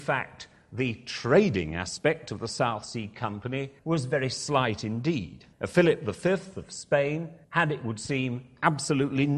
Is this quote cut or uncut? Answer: cut